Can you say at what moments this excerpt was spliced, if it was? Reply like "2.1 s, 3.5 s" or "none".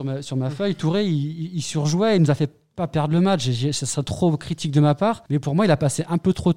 5.3 s